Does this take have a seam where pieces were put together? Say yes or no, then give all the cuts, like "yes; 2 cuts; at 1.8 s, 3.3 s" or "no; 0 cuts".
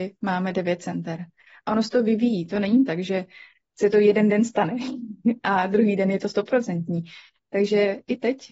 no; 0 cuts